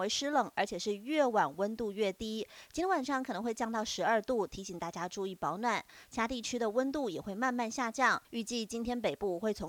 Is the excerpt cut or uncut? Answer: cut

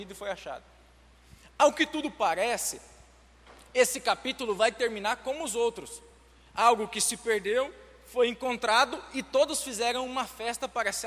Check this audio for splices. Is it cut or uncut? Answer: uncut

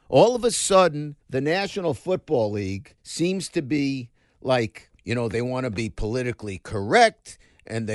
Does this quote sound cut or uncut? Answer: cut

